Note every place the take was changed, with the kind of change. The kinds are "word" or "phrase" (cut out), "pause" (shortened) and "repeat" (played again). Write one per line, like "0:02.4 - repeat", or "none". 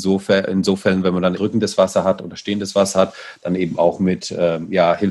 0:01.4 - word